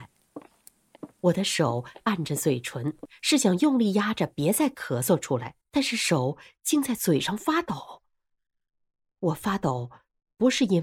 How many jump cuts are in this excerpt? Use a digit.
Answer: 1